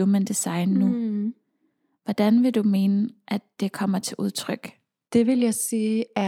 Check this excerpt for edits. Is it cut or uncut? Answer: uncut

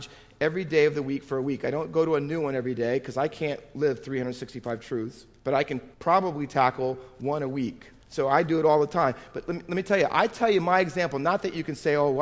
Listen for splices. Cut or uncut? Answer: cut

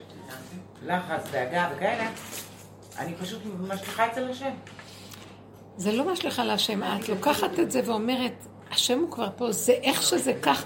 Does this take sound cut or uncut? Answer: uncut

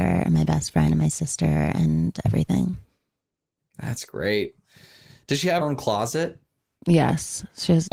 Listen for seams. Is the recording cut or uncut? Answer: cut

